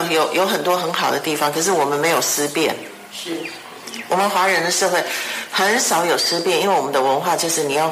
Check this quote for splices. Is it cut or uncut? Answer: uncut